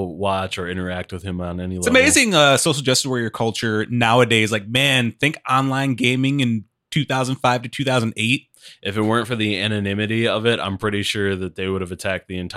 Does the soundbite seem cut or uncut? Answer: uncut